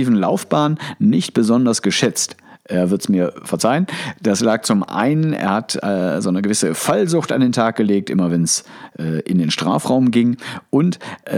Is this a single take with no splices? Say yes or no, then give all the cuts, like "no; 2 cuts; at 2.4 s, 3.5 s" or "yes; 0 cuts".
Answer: yes; 0 cuts